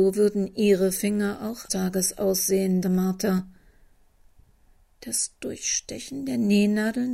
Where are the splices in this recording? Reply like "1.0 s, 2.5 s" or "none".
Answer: 1.7 s, 2.8 s